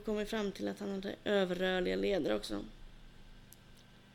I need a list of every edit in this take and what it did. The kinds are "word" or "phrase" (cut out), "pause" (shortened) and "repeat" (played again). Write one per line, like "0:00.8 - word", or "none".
none